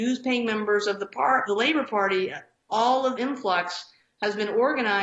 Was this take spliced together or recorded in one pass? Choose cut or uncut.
cut